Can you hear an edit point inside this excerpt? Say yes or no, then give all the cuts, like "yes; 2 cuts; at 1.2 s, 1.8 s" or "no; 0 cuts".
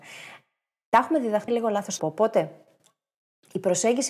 yes; 2 cuts; at 1.5 s, 2.0 s